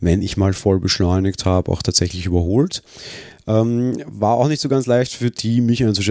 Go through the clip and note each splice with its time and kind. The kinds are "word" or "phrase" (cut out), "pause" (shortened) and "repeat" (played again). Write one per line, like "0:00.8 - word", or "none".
none

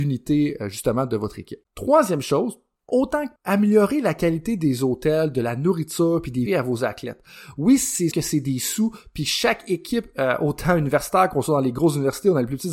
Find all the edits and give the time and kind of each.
0:01.7 - pause
0:02.8 - pause
0:03.4 - word
0:06.5 - phrase
0:08.1 - word

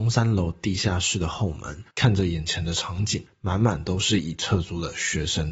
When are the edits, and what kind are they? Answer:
0:01.9 - pause

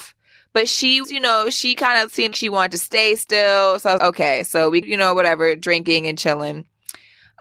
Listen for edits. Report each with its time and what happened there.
0:01.0 - word
0:02.3 - word
0:04.0 - word
0:04.8 - word

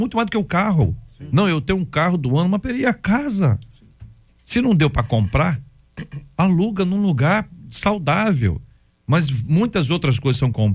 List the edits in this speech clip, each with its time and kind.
none

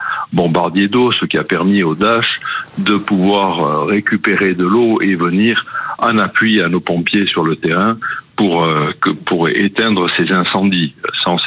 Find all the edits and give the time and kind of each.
none

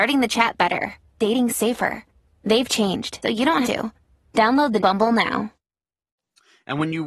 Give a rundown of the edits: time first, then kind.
0:01.2 - word
0:03.2 - word
0:03.6 - word
0:04.8 - word

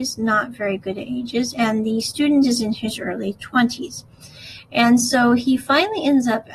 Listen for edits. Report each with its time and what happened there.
none

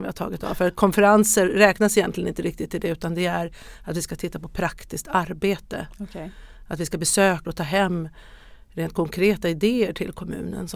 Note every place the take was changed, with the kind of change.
0:07.4 - phrase

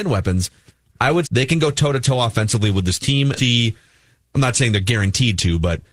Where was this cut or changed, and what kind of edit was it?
0:01.2 - word
0:03.4 - phrase

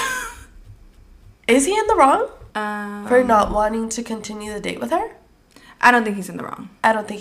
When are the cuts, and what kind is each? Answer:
0:02.5 - pause
0:05.5 - pause

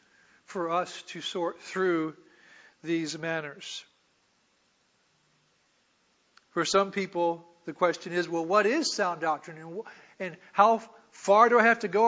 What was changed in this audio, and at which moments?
none

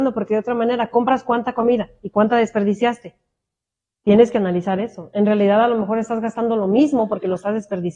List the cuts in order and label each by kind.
none

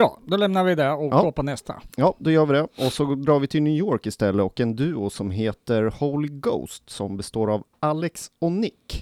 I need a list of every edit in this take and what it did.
none

